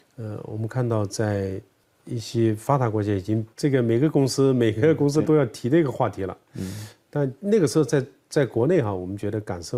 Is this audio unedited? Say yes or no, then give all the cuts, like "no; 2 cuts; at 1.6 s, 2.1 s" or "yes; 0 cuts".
no; 2 cuts; at 3.5 s, 5.2 s